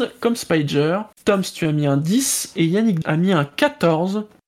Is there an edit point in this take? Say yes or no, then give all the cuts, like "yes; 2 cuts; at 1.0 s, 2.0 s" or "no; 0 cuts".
yes; 2 cuts; at 1.1 s, 3.0 s